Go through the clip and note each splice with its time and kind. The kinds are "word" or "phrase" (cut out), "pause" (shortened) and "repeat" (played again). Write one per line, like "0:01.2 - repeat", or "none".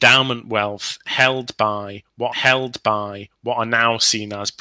0:02.3 - repeat